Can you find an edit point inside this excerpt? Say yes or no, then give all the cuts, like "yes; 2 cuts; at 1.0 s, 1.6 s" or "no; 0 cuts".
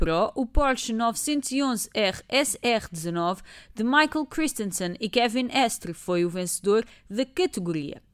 no; 0 cuts